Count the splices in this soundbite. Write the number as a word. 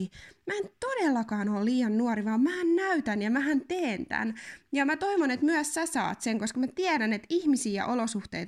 zero